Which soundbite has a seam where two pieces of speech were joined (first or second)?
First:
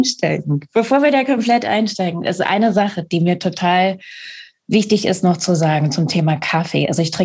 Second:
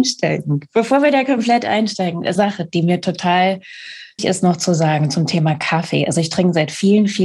second